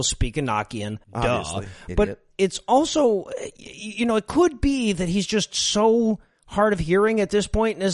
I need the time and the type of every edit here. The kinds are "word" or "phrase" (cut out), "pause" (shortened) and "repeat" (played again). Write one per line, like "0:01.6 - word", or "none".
0:01.0 - pause